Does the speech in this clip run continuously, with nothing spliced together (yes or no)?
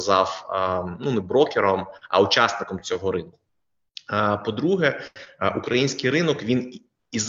yes